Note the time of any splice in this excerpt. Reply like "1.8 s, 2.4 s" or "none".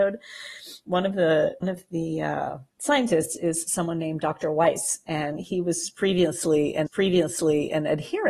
1.6 s, 2.7 s, 6.9 s